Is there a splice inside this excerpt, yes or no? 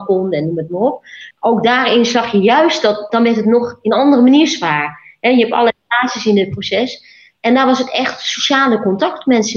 yes